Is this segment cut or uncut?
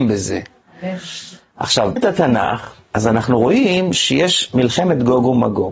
cut